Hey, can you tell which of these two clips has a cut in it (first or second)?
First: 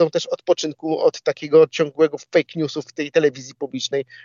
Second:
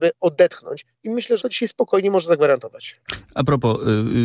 second